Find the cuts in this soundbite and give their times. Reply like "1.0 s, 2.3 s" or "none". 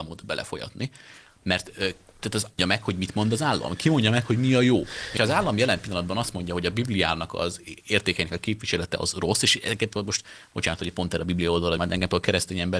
2.6 s, 5.2 s, 11.8 s